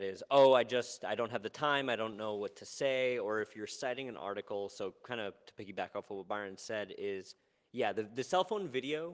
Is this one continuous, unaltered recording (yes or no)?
yes